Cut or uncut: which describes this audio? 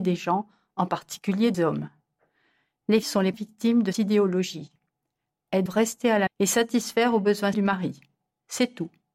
cut